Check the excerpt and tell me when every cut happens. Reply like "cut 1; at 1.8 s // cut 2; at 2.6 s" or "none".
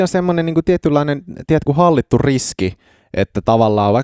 cut 1; at 1.7 s